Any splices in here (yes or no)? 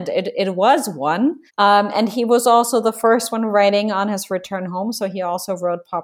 yes